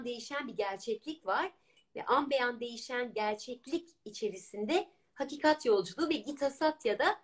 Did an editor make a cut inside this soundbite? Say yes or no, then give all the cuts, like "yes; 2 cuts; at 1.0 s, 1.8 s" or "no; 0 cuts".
no; 0 cuts